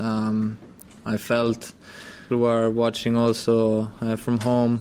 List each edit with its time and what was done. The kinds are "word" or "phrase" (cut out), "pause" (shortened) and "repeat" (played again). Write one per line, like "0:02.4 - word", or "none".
0:02.3 - phrase